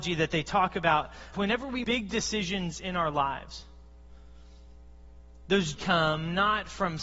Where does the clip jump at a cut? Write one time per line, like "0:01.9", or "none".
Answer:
0:01.3
0:01.8
0:05.7